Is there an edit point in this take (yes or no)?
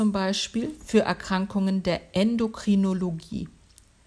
no